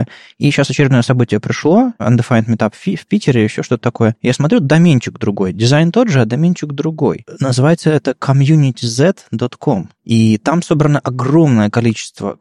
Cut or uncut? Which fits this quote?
uncut